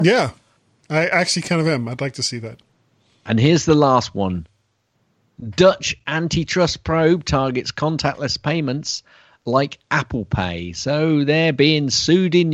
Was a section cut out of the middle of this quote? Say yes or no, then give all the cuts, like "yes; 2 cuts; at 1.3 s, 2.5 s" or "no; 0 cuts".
no; 0 cuts